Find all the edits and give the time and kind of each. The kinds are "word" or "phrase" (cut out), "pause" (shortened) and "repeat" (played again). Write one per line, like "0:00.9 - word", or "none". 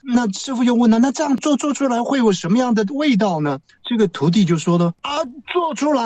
0:03.6 - pause
0:05.0 - pause